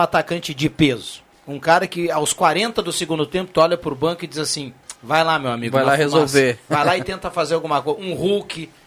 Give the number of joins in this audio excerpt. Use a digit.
1